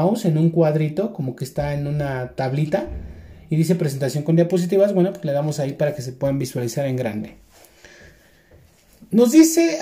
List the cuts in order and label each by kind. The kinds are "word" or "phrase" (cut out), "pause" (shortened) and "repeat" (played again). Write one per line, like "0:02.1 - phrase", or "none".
none